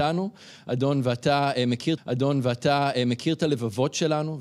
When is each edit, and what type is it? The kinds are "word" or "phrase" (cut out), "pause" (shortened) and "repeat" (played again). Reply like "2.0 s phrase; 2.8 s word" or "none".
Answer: 2.0 s repeat